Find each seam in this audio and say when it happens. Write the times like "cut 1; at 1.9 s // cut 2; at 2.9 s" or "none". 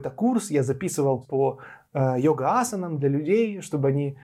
cut 1; at 1.2 s